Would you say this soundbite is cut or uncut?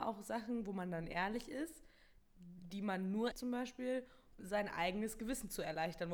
cut